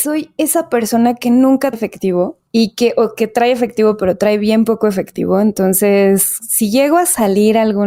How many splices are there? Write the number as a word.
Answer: one